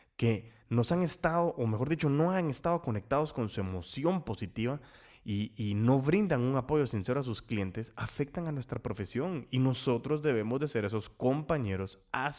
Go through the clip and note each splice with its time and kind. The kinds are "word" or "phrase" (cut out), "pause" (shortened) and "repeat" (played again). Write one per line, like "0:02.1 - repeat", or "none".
none